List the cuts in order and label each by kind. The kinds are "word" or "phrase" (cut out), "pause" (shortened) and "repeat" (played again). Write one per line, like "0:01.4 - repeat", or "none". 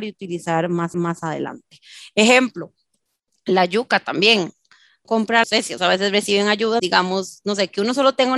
0:00.9 - repeat
0:05.0 - phrase
0:05.4 - phrase
0:05.8 - word
0:06.8 - word